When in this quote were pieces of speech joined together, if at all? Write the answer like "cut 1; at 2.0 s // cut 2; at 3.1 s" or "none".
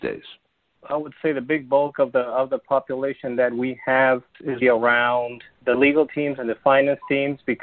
cut 1; at 4.6 s